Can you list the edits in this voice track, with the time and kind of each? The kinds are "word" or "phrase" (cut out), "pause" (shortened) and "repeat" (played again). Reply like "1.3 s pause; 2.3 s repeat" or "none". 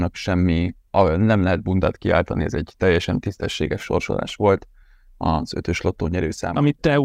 none